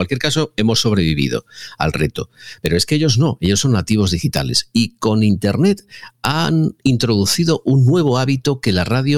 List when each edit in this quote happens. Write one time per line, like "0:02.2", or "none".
none